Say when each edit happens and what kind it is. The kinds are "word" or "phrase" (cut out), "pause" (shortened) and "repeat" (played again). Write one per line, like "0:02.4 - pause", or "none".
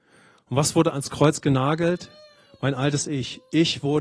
none